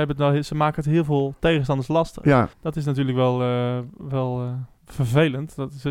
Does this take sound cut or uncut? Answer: cut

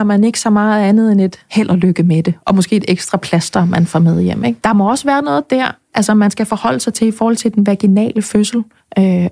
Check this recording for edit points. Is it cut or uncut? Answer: uncut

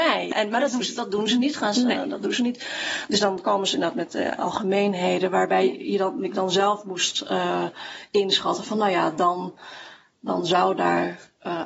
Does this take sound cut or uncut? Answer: uncut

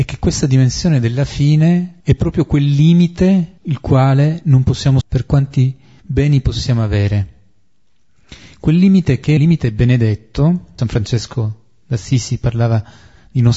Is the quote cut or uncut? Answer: cut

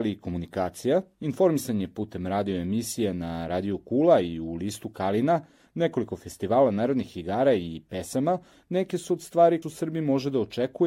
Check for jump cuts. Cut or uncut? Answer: cut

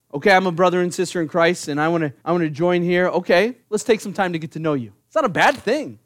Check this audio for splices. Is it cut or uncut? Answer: cut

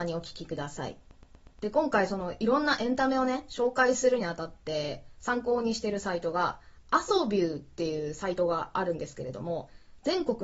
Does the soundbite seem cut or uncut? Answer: uncut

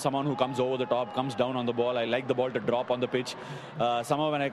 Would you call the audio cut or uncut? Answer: uncut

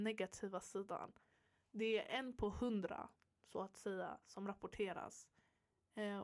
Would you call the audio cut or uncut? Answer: uncut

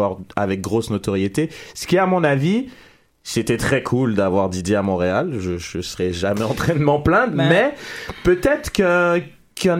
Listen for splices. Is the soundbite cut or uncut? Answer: uncut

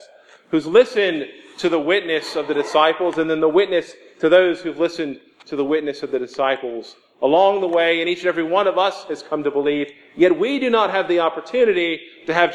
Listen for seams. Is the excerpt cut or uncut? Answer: uncut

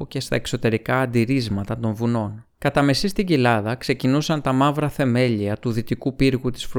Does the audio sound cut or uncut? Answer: cut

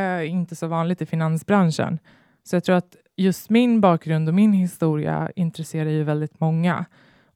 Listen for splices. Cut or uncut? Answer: uncut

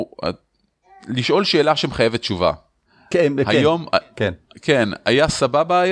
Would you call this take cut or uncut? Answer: cut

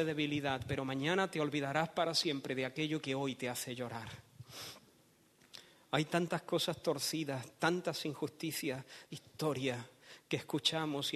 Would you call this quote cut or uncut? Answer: cut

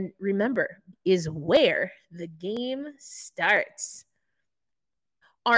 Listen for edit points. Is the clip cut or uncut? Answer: cut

